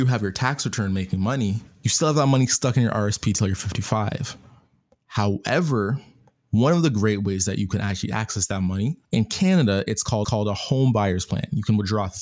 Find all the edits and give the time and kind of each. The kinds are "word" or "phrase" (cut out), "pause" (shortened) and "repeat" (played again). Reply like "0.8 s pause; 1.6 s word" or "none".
1.7 s pause; 9.0 s pause; 10.2 s repeat